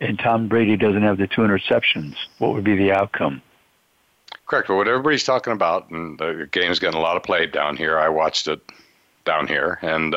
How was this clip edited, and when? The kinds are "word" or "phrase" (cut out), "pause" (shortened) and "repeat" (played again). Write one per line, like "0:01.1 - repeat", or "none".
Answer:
0:04.4 - pause

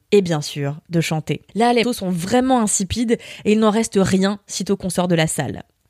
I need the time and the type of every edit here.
0:01.5 - pause
0:01.8 - word

